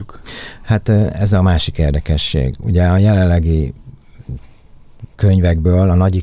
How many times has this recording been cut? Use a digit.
1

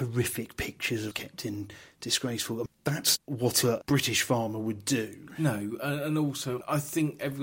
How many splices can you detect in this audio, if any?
2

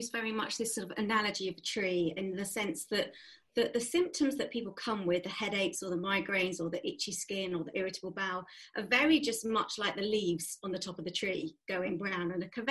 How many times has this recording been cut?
0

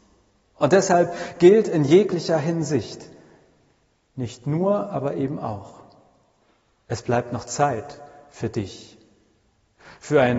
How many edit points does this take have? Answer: 0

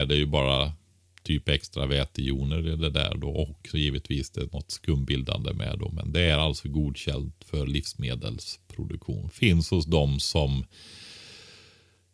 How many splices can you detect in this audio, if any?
0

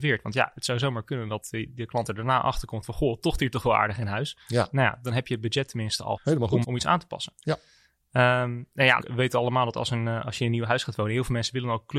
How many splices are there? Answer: 3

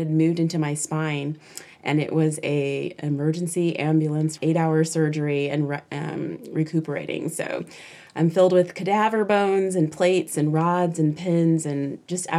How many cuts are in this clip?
1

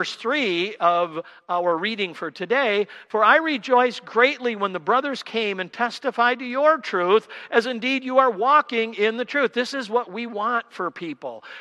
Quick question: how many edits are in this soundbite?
0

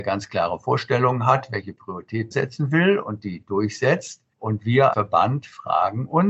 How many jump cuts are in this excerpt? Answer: 3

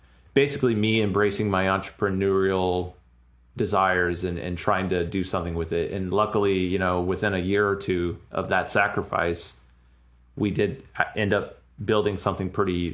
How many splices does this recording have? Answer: 0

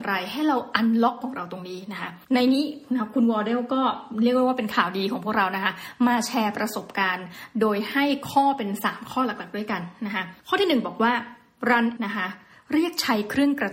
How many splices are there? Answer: 4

